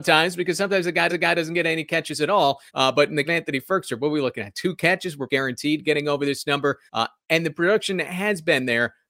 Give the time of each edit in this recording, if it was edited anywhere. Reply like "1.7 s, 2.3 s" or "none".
1.1 s, 2.7 s, 3.2 s, 5.3 s, 6.9 s